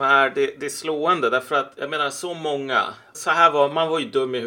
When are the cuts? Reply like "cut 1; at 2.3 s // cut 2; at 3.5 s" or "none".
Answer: cut 1; at 3.1 s